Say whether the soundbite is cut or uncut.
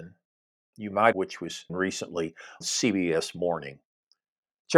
cut